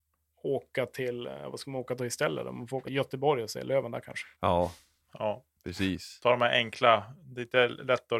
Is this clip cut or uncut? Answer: cut